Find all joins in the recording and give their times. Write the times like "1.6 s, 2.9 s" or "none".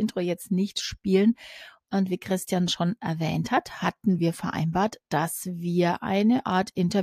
none